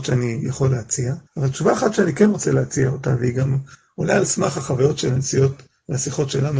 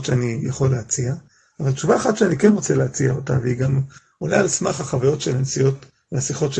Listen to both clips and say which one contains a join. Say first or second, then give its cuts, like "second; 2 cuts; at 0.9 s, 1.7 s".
first; 1 cut; at 1.3 s